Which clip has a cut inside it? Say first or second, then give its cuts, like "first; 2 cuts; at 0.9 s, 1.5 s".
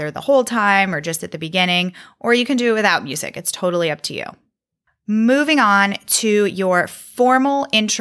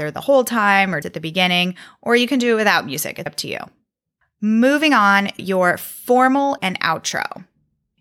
second; 4 cuts; at 1.0 s, 3.3 s, 5.4 s, 6.6 s